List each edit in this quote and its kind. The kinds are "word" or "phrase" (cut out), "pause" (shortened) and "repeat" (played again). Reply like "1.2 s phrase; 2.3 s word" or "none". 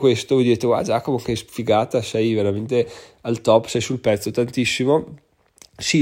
none